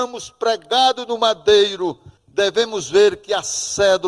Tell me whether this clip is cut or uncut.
cut